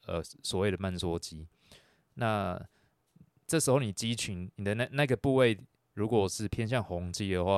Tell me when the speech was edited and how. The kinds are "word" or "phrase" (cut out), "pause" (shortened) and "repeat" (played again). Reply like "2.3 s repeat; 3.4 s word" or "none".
none